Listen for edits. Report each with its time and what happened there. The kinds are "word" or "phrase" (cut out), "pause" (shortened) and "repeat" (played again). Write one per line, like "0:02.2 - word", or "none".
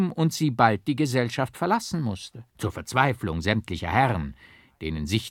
0:02.5 - pause